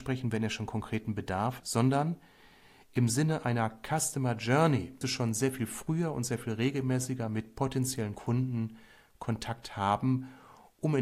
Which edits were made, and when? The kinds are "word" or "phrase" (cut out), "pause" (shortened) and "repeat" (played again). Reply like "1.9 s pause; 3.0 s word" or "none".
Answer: 1.6 s word; 5.0 s word